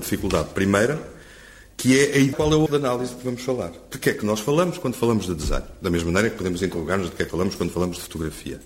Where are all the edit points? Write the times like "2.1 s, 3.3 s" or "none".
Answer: 2.3 s, 2.7 s, 7.3 s